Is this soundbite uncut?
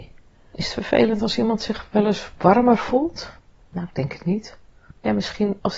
yes; 0 cuts

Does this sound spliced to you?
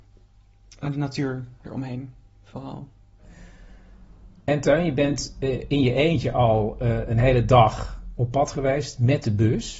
no; 0 cuts

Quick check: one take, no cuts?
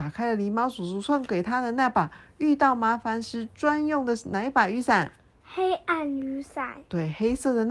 yes; 0 cuts

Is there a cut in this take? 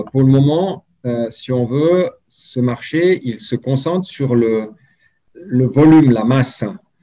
no; 0 cuts

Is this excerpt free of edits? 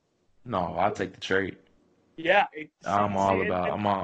yes; 0 cuts

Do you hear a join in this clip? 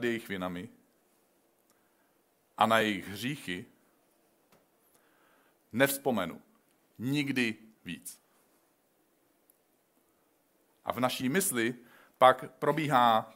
no; 0 cuts

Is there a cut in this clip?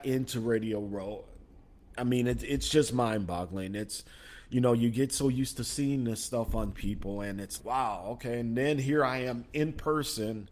yes; 2 cuts; at 6.7 s, 7.6 s

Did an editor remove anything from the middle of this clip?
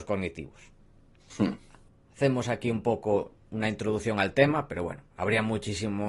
no; 0 cuts

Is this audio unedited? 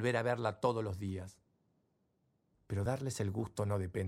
yes; 0 cuts

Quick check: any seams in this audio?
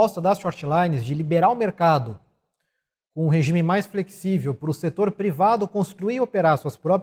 no; 0 cuts

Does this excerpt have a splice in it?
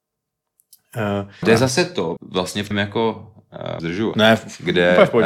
yes; 5 cuts; at 1.4 s, 2.2 s, 2.7 s, 3.8 s, 4.1 s

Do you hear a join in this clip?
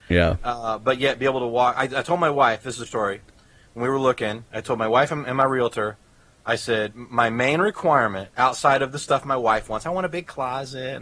yes; 1 cut; at 2.9 s

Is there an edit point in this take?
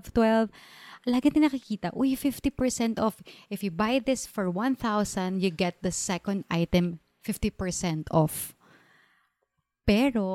no; 0 cuts

